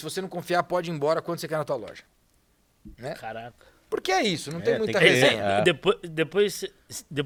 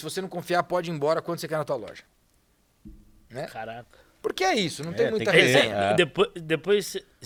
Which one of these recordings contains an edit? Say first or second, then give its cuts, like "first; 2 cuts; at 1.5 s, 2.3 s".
first; 1 cut; at 2.9 s